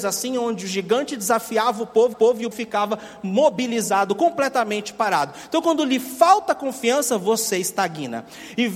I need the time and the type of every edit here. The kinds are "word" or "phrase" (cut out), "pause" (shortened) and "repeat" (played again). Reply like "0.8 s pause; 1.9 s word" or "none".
2.1 s repeat; 2.5 s word